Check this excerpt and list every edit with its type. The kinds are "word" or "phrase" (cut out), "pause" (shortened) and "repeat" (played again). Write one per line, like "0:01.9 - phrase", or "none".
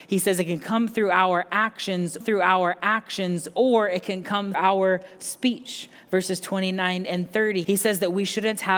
0:02.2 - repeat
0:04.5 - word
0:07.6 - word

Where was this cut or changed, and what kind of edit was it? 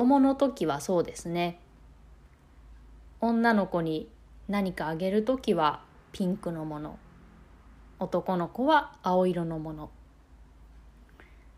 none

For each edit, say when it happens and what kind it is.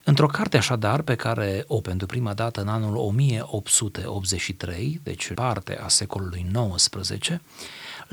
0:01.8 - word
0:05.3 - word

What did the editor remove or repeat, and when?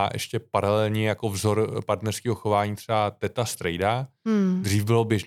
none

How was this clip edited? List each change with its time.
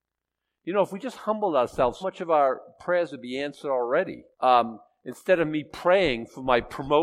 0:02.0 - word
0:04.3 - pause

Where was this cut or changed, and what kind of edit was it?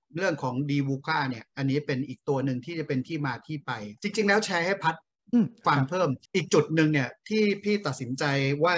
0:04.0 - pause
0:06.3 - pause

